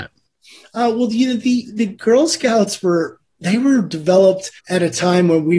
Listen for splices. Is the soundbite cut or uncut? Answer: cut